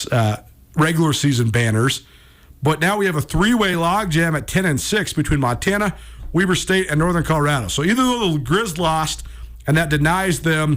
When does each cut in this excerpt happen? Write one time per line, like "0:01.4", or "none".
none